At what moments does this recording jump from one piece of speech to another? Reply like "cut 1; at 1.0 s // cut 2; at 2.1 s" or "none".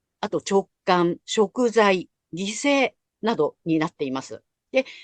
cut 1; at 1.2 s // cut 2; at 3.6 s